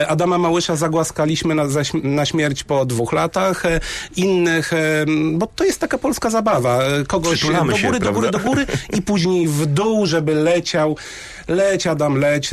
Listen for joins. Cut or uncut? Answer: uncut